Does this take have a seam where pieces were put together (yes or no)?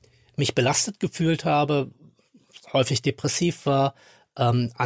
yes